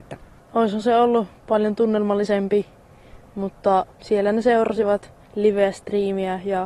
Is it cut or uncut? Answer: cut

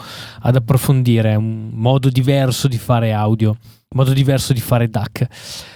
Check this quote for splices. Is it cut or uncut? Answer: uncut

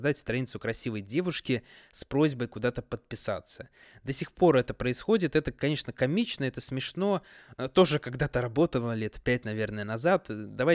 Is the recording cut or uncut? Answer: uncut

